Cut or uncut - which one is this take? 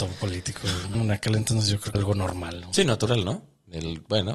cut